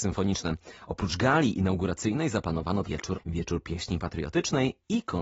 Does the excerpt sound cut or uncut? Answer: cut